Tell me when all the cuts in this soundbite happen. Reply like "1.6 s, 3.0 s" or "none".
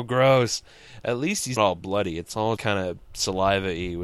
1.6 s, 2.6 s